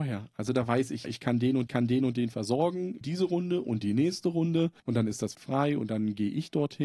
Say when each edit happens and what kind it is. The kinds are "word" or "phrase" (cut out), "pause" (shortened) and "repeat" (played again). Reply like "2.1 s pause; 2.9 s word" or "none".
1.0 s word; 1.7 s repeat; 3.0 s word; 4.8 s pause; 5.3 s word